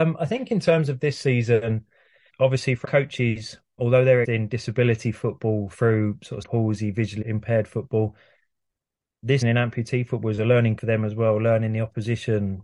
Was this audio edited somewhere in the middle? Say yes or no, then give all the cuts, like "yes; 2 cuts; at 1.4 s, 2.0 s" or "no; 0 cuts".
yes; 8 cuts; at 2.3 s, 2.8 s, 3.8 s, 4.2 s, 6.4 s, 7.2 s, 9.4 s, 10.8 s